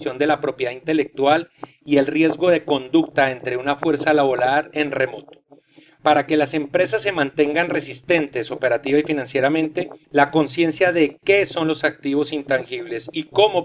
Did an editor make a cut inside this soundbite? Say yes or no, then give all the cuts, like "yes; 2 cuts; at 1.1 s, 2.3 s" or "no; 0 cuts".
yes; 1 cut; at 10.0 s